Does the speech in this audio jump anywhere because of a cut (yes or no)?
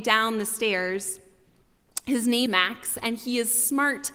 yes